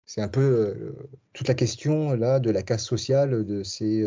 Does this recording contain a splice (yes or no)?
yes